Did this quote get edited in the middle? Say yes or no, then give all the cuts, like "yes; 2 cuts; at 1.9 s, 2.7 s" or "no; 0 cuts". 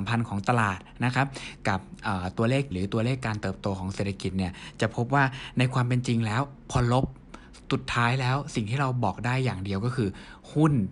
yes; 1 cut; at 2.7 s